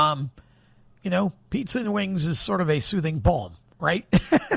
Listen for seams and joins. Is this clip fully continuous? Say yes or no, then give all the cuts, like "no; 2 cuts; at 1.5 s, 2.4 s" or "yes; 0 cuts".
yes; 0 cuts